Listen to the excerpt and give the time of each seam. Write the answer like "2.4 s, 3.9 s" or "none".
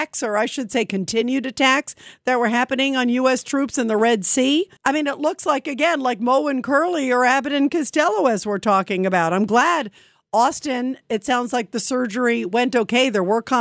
4.8 s